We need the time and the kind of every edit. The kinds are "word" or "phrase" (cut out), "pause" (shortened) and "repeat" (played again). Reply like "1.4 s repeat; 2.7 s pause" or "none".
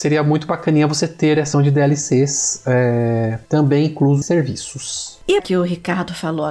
1.5 s word; 4.2 s word; 5.4 s word